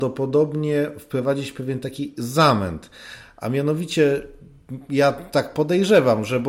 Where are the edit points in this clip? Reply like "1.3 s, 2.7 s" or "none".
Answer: none

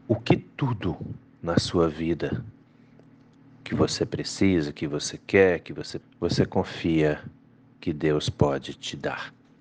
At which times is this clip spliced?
6.0 s

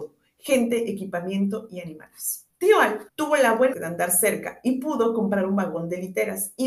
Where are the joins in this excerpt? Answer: 2.5 s, 3.1 s, 3.7 s

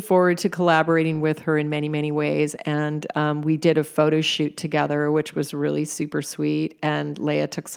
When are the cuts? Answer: none

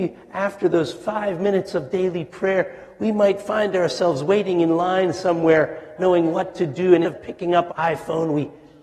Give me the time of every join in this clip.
6.0 s, 7.0 s, 7.7 s

